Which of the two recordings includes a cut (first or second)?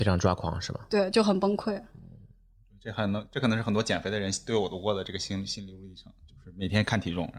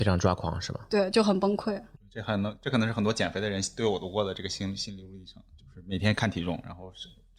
second